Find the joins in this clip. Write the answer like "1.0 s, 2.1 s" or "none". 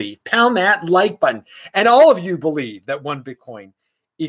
none